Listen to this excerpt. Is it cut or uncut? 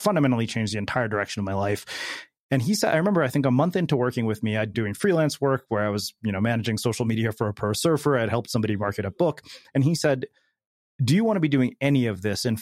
cut